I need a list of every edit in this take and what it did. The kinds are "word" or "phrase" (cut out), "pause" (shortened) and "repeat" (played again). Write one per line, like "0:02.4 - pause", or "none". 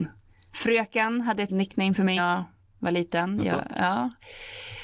0:01.5 - word
0:02.2 - word